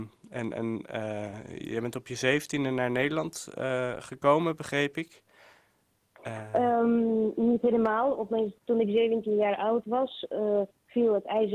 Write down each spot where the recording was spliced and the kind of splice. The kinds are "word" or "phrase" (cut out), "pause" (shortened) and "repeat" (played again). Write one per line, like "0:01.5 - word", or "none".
0:08.6 - pause